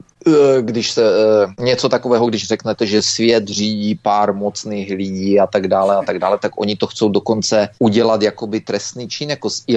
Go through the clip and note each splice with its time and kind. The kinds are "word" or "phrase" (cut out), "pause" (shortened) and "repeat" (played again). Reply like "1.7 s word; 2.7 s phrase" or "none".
none